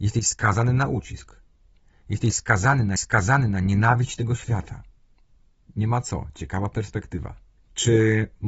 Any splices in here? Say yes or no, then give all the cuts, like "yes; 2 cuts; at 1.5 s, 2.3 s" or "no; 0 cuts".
yes; 3 cuts; at 3.0 s, 5.0 s, 7.6 s